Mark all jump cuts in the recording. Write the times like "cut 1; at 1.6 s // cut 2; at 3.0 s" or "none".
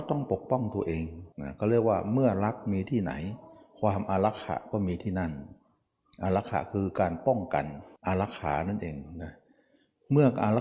cut 1; at 1.3 s // cut 2; at 8.0 s